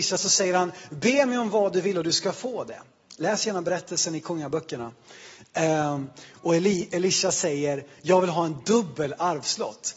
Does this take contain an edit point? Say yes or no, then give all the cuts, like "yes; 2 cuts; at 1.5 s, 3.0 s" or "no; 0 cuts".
no; 0 cuts